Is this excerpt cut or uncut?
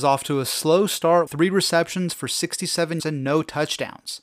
cut